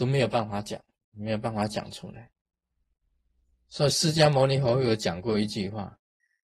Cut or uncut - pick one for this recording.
uncut